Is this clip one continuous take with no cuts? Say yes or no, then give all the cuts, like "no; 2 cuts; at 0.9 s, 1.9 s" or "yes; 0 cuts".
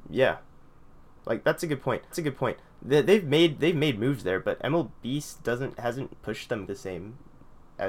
no; 3 cuts; at 2.1 s, 6.1 s, 6.7 s